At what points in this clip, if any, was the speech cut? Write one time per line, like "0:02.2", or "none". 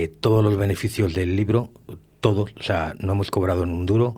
none